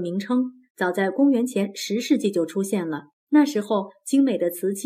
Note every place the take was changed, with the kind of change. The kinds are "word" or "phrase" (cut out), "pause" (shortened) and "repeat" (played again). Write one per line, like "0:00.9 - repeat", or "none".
0:03.2 - pause